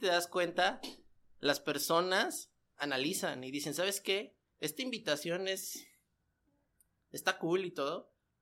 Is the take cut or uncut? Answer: uncut